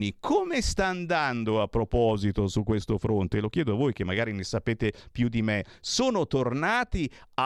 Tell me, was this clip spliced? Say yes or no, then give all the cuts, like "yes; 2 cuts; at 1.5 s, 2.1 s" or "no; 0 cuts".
no; 0 cuts